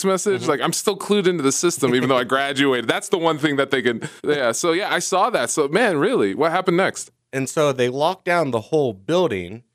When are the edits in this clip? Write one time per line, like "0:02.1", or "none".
0:04.2